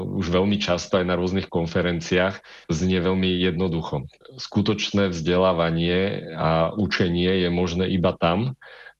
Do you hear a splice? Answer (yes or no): yes